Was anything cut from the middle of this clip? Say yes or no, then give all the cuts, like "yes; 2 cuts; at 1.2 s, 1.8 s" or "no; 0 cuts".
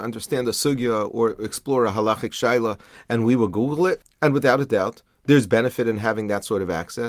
no; 0 cuts